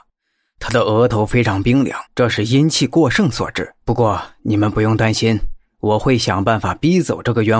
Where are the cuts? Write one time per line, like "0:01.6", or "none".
0:02.1
0:03.8